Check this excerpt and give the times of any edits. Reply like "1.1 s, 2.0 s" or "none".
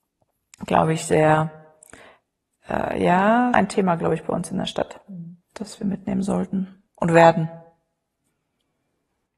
3.5 s, 5.4 s, 6.9 s